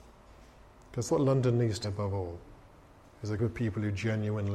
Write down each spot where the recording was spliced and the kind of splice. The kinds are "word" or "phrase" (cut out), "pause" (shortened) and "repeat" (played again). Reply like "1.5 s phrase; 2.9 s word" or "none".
1.1 s word; 1.8 s word; 3.4 s word

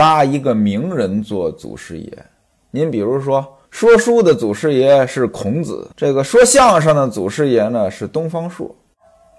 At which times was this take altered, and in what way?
3.6 s pause; 5.9 s pause

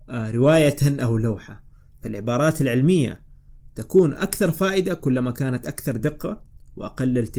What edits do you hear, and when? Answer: none

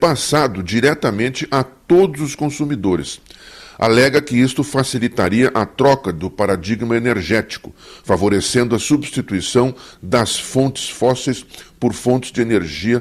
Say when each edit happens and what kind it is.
none

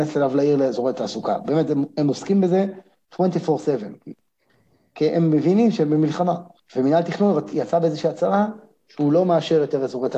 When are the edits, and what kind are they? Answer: 6.6 s pause

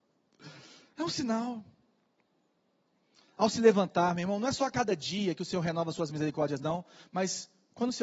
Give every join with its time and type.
none

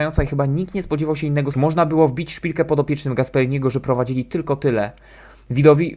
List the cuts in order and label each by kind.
1.5 s phrase

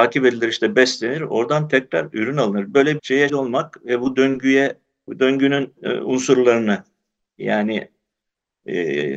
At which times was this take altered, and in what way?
3.0 s word; 3.3 s word; 5.1 s word; 5.8 s word

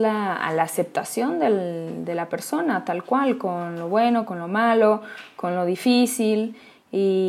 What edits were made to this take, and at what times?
none

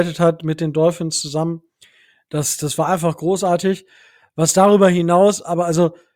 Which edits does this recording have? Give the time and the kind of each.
none

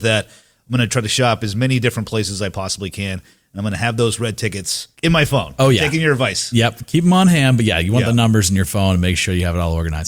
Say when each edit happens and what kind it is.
4.9 s pause

